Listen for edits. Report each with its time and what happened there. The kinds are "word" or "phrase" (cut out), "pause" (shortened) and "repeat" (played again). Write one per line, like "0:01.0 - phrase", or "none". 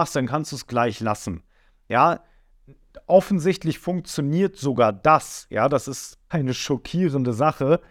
0:06.3 - word